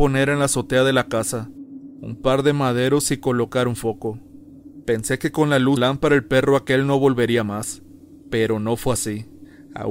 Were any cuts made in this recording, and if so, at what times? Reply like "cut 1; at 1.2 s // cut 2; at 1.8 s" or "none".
cut 1; at 5.8 s